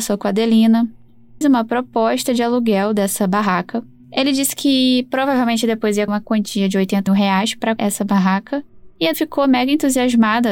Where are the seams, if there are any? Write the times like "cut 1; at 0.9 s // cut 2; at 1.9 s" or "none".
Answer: cut 1; at 1.4 s // cut 2; at 6.1 s // cut 3; at 7.1 s // cut 4; at 7.8 s // cut 5; at 9.1 s

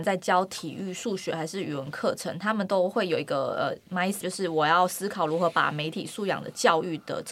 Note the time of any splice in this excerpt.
cut 1; at 4.2 s

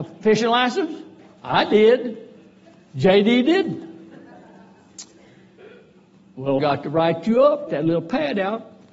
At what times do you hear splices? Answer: cut 1; at 6.6 s // cut 2; at 7.7 s

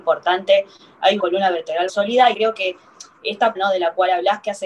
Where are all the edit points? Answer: cut 1; at 1.2 s // cut 2; at 1.9 s // cut 3; at 2.3 s // cut 4; at 3.6 s

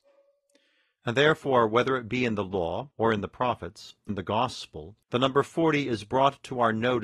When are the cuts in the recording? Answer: cut 1; at 2.9 s // cut 2; at 4.1 s // cut 3; at 5.0 s

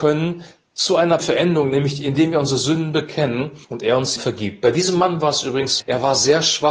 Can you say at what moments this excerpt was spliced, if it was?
cut 1; at 1.2 s // cut 2; at 3.6 s // cut 3; at 4.2 s // cut 4; at 5.8 s

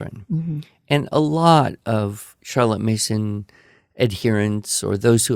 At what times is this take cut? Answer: none

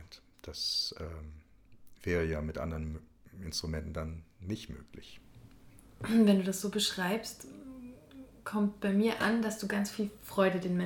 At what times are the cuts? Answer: none

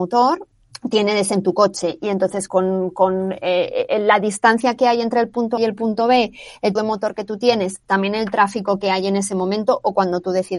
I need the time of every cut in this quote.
cut 1; at 2.5 s // cut 2; at 3.9 s // cut 3; at 5.6 s // cut 4; at 6.8 s

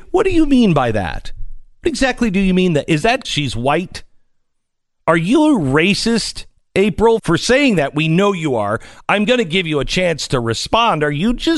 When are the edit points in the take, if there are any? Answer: cut 1; at 3.2 s // cut 2; at 7.2 s

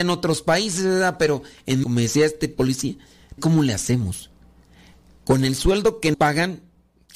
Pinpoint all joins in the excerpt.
cut 1; at 1.8 s // cut 2; at 3.4 s // cut 3; at 6.1 s

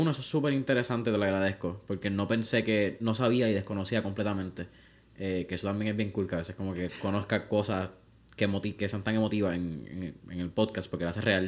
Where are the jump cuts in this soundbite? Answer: none

